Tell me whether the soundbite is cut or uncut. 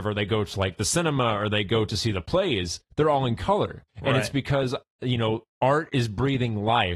cut